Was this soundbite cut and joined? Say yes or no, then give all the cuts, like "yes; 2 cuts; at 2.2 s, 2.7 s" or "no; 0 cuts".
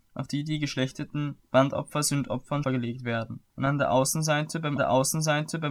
yes; 4 cuts; at 1.4 s, 2.6 s, 3.5 s, 4.8 s